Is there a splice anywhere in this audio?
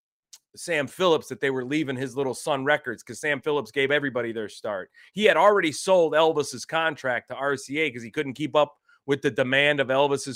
no; 0 cuts

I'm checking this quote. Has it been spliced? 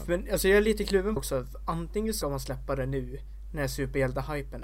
yes; 2 cuts; at 1.2 s, 2.2 s

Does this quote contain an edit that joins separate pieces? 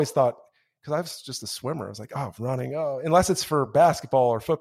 no; 0 cuts

